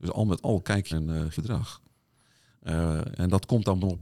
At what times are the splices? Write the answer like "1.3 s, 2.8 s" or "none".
0.9 s, 1.3 s